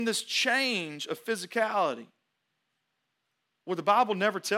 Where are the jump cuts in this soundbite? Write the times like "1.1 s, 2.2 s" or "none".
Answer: none